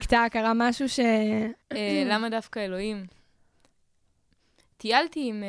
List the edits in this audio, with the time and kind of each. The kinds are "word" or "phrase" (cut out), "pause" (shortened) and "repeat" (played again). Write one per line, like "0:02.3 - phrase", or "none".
0:01.6 - pause